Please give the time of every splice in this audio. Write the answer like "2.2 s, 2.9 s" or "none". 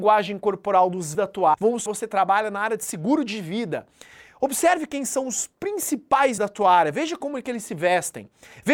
1.1 s, 1.5 s, 1.9 s, 6.4 s